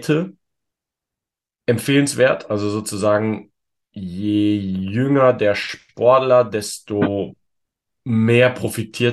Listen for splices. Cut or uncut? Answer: uncut